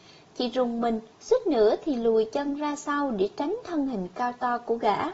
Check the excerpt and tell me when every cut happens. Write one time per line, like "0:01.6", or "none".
0:01.1